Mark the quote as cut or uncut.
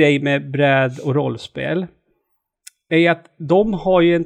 uncut